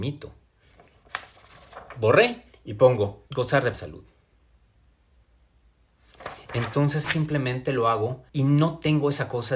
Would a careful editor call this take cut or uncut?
cut